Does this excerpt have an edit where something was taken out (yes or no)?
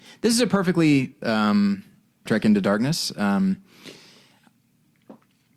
yes